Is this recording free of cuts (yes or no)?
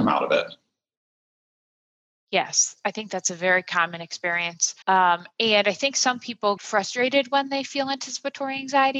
no